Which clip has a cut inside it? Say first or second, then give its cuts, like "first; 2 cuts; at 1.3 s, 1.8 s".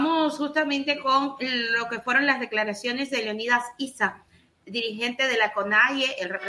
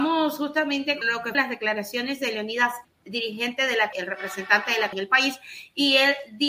second; 5 cuts; at 1.0 s, 1.3 s, 2.8 s, 3.9 s, 4.9 s